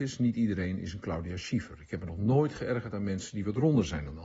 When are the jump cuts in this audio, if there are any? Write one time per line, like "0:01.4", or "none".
none